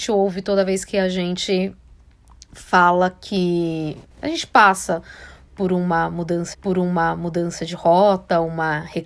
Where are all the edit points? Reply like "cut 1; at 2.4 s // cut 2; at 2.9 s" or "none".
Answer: cut 1; at 4.1 s // cut 2; at 6.5 s